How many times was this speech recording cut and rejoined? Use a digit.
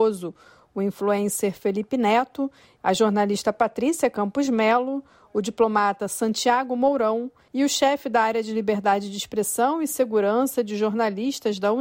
0